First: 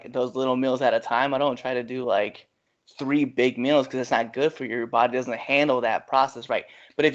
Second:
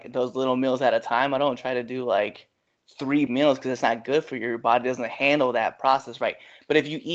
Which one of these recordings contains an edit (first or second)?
second